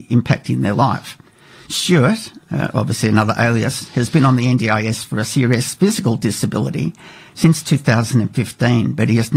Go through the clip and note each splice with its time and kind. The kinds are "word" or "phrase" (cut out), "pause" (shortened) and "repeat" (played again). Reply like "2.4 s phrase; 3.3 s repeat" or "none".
none